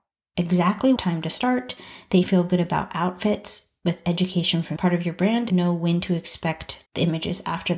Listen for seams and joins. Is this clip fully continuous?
no; 5 cuts; at 1.0 s, 2.2 s, 4.8 s, 5.5 s, 6.9 s

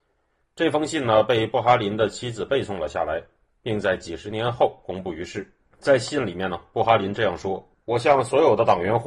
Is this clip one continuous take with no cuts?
yes; 0 cuts

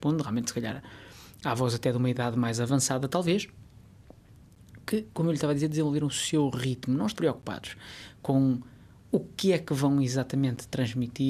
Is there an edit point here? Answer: yes; 1 cut; at 7.2 s

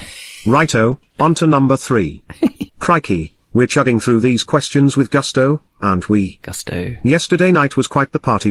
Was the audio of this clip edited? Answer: yes; 1 cut; at 2.7 s

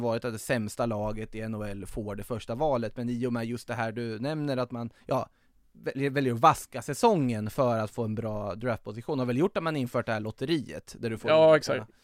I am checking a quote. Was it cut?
yes; 1 cut; at 5.0 s

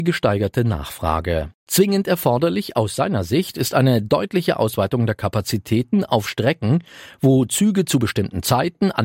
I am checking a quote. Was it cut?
no; 0 cuts

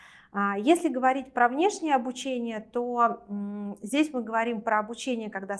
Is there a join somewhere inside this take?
no; 0 cuts

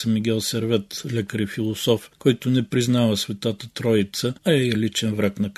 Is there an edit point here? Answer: yes; 1 cut; at 4.4 s

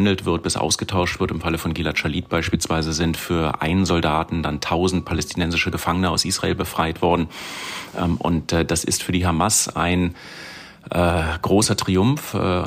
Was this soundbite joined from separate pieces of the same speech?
no; 0 cuts

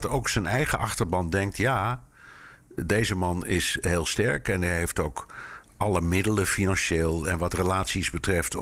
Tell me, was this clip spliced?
yes; 1 cut; at 2.8 s

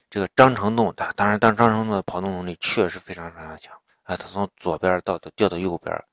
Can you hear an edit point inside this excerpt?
yes; 1 cut; at 3.9 s

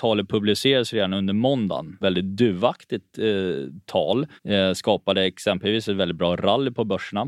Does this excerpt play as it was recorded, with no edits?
no; 2 cuts; at 2.0 s, 4.4 s

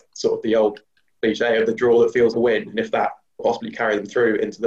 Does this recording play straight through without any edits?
no; 2 cuts; at 2.3 s, 3.4 s

